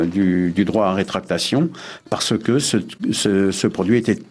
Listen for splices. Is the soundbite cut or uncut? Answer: uncut